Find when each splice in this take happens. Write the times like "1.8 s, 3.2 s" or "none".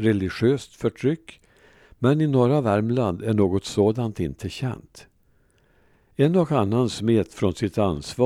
none